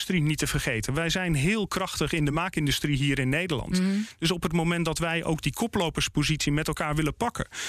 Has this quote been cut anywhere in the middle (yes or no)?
no